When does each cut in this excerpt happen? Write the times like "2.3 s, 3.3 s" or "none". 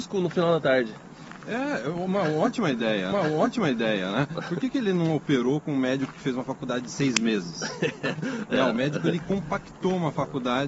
3.1 s

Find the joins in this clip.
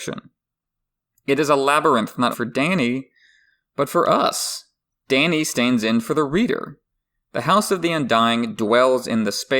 2.3 s

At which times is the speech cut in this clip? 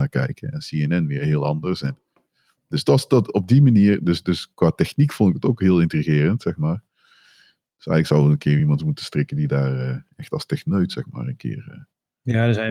none

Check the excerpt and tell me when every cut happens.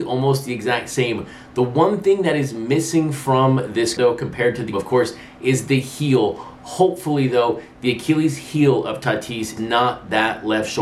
4.0 s, 4.7 s, 9.6 s

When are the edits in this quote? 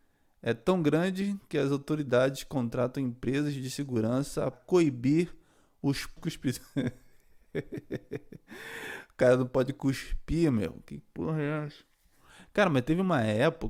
4.5 s, 6.2 s

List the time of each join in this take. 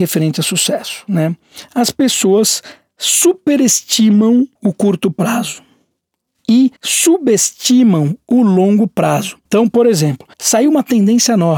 4.6 s, 6.8 s, 9.5 s, 10.3 s

